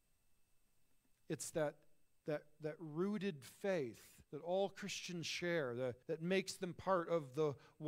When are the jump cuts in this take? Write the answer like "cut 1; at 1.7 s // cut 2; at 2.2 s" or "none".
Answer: cut 1; at 4.2 s // cut 2; at 6.0 s